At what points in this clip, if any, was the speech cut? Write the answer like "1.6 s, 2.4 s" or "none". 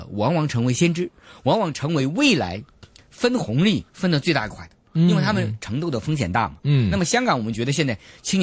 3.9 s